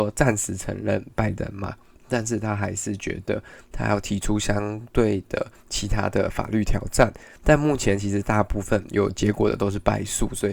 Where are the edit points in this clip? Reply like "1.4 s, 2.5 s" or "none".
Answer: none